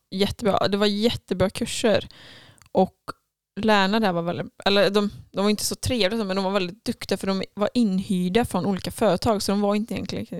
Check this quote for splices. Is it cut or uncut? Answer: uncut